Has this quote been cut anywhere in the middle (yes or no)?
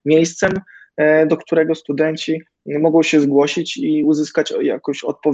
no